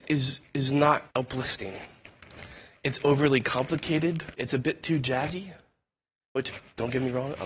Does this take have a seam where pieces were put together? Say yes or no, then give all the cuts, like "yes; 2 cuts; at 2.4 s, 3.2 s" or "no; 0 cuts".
yes; 2 cuts; at 1.1 s, 4.3 s